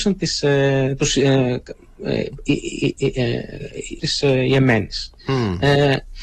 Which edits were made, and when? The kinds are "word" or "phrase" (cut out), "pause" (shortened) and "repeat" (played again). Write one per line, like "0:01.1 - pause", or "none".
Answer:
0:04.0 - word